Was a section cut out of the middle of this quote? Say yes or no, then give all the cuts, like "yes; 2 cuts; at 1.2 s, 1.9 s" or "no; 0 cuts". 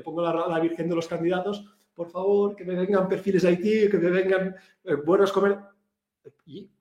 no; 0 cuts